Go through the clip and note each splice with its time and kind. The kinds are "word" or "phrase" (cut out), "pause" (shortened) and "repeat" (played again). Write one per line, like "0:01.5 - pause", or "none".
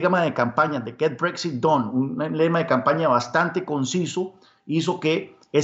none